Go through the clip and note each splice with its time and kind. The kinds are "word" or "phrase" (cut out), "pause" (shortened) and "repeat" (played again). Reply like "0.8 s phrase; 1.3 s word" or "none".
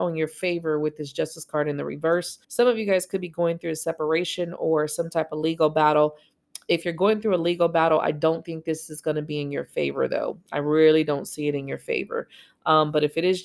2.4 s pause